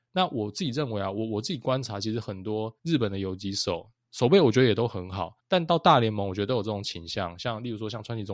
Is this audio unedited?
no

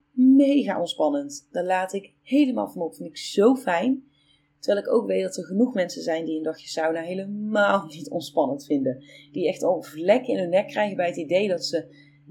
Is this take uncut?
yes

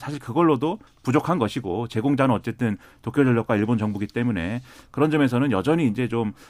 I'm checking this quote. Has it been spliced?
no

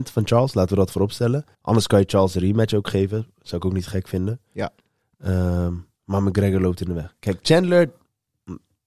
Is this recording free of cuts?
no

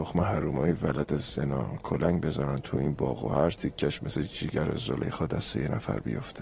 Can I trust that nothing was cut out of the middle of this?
yes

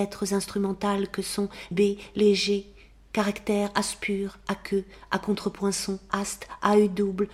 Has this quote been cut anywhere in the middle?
yes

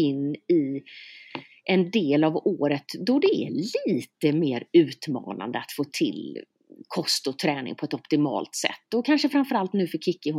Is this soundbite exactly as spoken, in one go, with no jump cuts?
yes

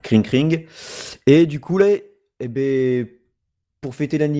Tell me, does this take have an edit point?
no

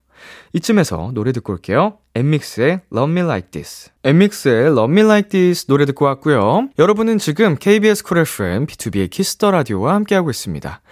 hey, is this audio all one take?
no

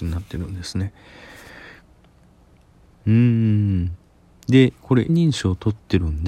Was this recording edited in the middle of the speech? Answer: yes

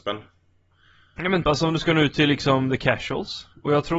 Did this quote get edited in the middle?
yes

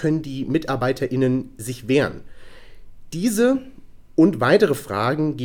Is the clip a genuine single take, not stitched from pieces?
yes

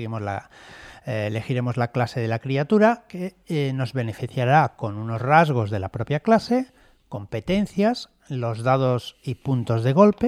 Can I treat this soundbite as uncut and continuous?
yes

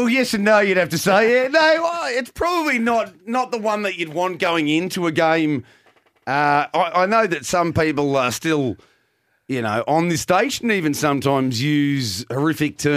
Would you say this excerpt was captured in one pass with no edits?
yes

